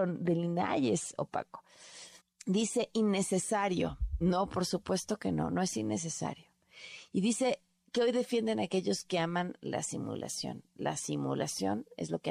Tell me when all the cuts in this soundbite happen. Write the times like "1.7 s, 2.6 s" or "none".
2.2 s